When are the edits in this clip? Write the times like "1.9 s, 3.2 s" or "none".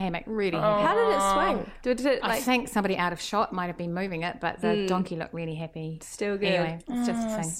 none